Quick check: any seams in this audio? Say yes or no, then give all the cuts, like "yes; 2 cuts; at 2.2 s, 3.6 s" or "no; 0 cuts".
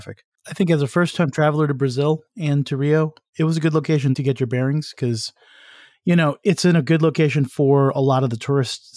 no; 0 cuts